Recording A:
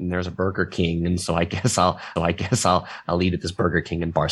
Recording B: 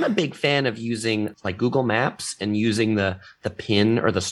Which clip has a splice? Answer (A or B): A